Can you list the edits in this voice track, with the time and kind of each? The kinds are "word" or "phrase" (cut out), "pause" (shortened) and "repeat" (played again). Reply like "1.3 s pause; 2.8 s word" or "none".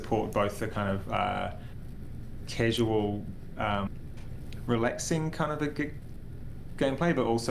none